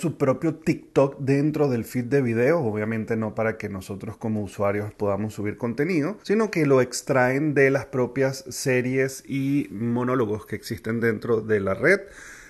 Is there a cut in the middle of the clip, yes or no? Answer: yes